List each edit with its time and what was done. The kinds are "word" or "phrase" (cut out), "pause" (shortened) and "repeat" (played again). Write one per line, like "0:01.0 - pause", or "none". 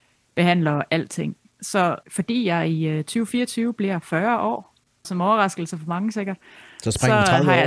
0:02.0 - pause
0:05.0 - phrase